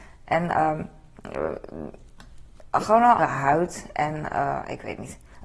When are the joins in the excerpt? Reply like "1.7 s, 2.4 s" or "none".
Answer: 3.2 s

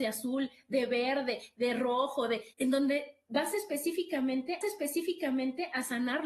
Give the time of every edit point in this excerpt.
2.5 s, 4.6 s

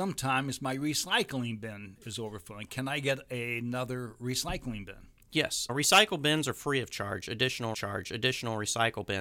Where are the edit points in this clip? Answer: 5.7 s, 7.7 s

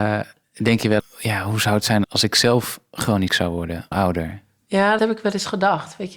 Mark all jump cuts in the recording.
1.0 s, 2.0 s, 3.3 s, 3.9 s, 5.0 s

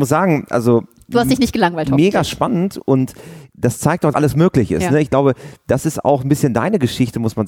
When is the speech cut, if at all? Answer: 3.5 s, 4.1 s

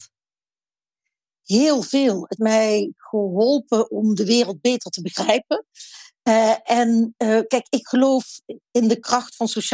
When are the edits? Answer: 2.4 s

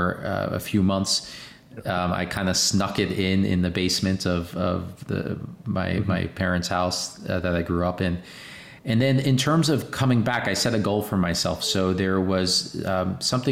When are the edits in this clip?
none

